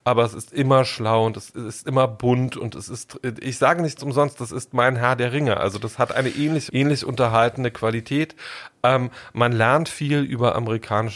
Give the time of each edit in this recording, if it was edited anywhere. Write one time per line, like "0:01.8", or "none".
0:04.0
0:06.7